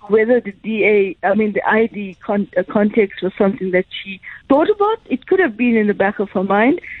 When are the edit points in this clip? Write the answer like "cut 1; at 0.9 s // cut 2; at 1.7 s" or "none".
cut 1; at 4.4 s